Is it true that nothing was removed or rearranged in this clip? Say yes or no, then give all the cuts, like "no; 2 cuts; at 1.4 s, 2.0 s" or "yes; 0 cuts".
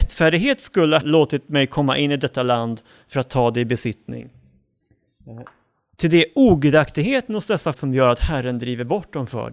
no; 2 cuts; at 1.0 s, 7.7 s